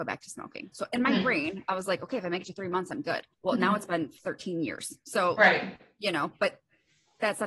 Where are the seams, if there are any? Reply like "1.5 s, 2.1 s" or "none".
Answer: 3.3 s, 4.2 s, 5.4 s